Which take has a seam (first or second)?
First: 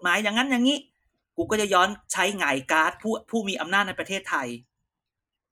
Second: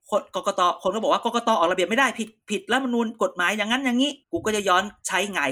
second